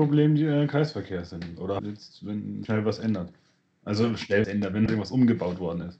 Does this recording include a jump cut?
yes; 4 cuts; at 1.8 s, 2.6 s, 4.4 s, 4.9 s

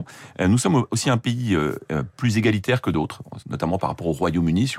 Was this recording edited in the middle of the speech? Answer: no; 0 cuts

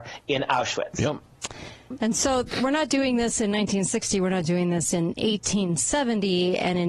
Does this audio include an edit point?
no; 0 cuts

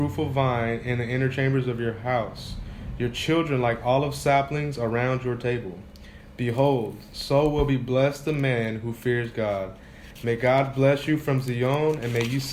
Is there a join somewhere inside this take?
no; 0 cuts

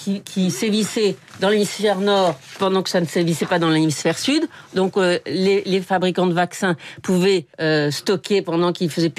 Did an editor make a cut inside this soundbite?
yes; 1 cut; at 7.5 s

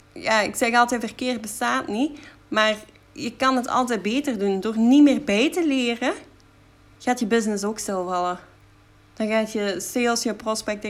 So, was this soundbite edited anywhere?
no; 0 cuts

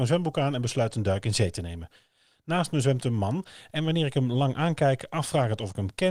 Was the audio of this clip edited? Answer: no; 0 cuts

